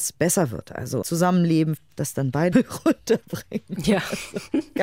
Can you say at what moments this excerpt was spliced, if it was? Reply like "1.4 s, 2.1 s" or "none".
1.0 s, 1.8 s, 2.5 s